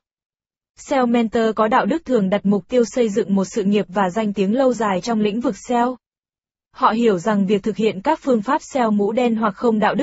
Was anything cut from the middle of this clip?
no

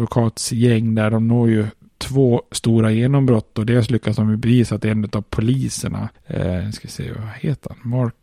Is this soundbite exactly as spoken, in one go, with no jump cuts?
yes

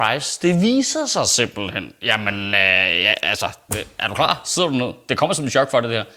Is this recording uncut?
no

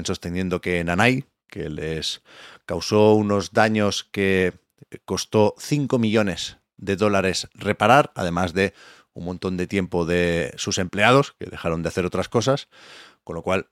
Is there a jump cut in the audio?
no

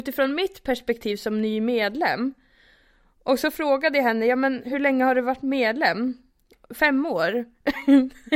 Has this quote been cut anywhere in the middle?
no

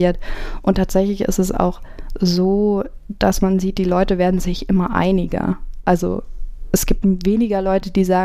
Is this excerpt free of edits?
yes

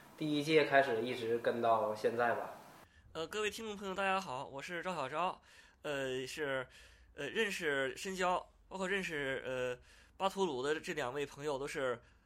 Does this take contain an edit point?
no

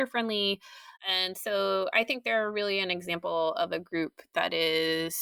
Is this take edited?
yes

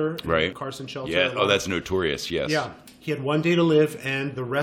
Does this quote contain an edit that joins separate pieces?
no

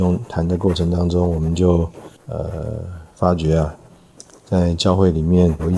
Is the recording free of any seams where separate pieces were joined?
no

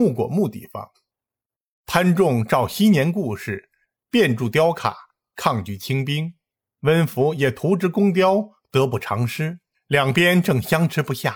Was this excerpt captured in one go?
yes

